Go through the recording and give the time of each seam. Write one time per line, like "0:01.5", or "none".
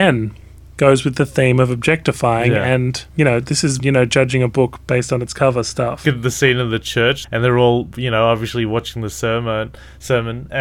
0:03.1
0:03.8
0:06.0
0:07.2

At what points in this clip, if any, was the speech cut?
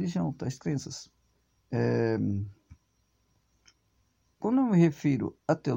0:01.5

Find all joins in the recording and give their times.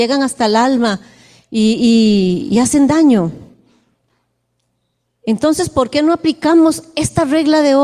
none

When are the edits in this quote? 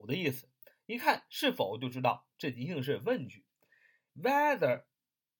0:04.1

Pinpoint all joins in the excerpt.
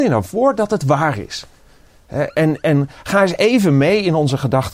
none

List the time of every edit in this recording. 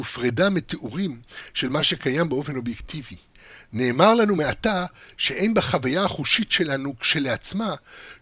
none

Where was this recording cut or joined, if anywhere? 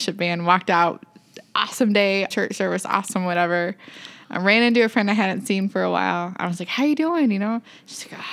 0:02.3

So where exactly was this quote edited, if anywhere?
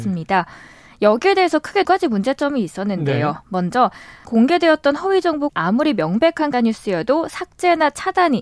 0:01.8
0:04.2
0:05.5
0:06.5

